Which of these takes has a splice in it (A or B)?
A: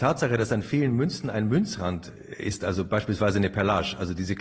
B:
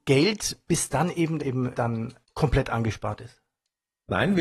B